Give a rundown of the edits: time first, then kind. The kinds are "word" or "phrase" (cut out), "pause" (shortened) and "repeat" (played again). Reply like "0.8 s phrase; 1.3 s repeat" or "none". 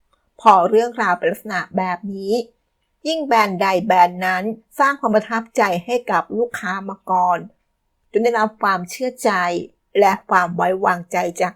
none